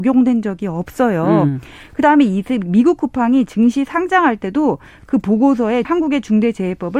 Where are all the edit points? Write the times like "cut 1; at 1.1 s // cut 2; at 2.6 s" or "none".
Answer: cut 1; at 5.8 s